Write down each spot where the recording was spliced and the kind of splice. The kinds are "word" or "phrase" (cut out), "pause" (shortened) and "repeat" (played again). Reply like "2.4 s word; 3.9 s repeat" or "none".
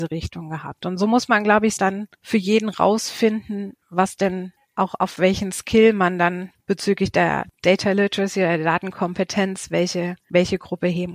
1.8 s phrase; 3.8 s pause; 4.6 s phrase; 6.6 s pause